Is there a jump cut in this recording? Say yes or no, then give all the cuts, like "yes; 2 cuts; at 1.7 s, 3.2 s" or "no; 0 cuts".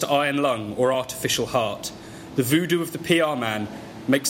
no; 0 cuts